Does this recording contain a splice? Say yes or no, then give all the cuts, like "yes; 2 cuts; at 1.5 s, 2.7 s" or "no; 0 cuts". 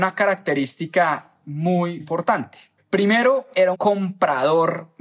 yes; 3 cuts; at 2.0 s, 2.8 s, 3.7 s